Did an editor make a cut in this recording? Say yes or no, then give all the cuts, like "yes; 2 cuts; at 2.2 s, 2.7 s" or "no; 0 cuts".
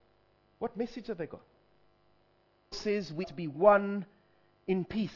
yes; 2 cuts; at 2.7 s, 3.2 s